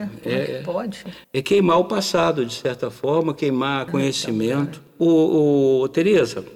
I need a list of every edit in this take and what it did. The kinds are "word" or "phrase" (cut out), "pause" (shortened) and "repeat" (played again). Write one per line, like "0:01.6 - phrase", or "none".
0:01.2 - pause
0:03.9 - phrase